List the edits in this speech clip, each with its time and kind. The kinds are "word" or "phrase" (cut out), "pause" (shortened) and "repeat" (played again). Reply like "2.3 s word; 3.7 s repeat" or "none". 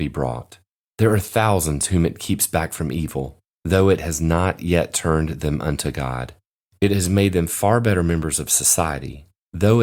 none